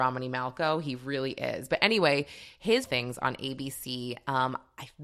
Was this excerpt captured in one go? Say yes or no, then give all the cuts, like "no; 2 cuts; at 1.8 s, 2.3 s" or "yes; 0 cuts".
no; 1 cut; at 2.8 s